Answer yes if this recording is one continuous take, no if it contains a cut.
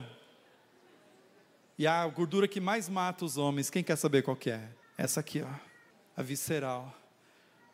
no